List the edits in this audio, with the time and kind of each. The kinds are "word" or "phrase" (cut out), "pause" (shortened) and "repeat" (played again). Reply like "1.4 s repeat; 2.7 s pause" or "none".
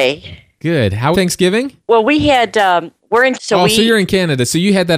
1.1 s phrase; 1.8 s pause; 3.0 s pause; 3.3 s word